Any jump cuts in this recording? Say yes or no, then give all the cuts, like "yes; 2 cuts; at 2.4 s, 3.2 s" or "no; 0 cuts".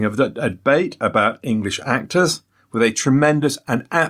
no; 0 cuts